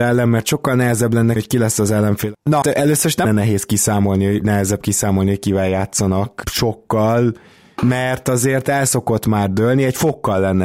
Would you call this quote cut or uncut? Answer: cut